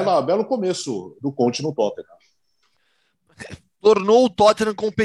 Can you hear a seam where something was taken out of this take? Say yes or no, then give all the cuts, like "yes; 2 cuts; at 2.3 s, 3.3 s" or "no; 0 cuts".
no; 0 cuts